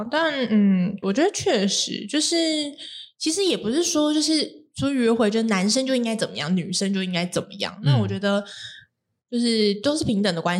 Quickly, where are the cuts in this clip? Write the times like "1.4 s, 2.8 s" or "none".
1.0 s